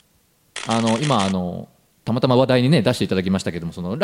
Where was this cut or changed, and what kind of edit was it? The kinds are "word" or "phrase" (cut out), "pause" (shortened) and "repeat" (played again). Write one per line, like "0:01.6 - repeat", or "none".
none